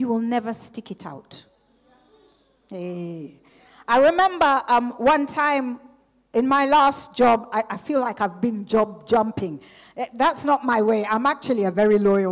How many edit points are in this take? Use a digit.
0